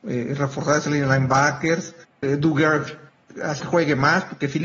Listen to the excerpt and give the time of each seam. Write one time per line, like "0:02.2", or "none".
0:02.2
0:03.6